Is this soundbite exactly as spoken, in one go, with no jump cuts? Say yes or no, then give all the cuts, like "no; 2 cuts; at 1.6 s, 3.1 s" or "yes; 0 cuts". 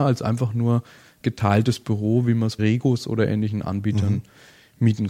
no; 1 cut; at 2.6 s